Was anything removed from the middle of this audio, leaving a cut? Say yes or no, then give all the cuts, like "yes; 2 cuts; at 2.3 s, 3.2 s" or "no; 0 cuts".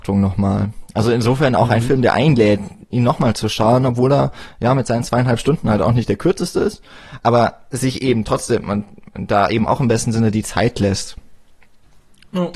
no; 0 cuts